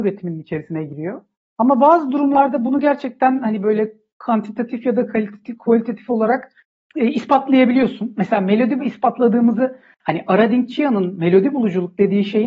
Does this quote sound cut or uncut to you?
cut